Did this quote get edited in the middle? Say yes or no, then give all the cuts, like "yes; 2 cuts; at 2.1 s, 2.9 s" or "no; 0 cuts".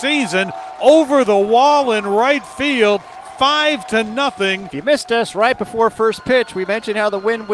yes; 1 cut; at 4.7 s